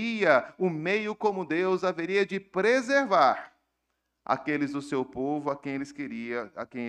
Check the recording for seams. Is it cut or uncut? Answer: uncut